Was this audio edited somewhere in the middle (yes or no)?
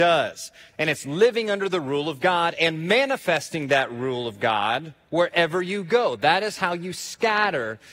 yes